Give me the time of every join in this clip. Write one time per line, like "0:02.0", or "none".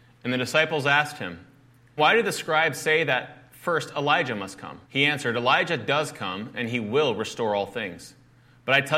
0:02.0
0:04.8